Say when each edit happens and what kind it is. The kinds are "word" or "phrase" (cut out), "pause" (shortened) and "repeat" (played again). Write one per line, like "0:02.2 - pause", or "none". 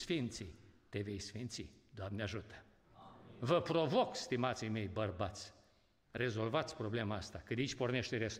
none